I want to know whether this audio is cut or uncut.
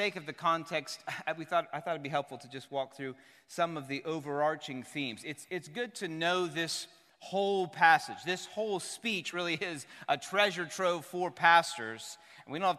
uncut